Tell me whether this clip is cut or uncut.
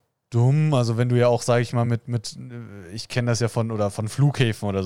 uncut